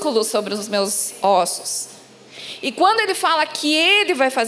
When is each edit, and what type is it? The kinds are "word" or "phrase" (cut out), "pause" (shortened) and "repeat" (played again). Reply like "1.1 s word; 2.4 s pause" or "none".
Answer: none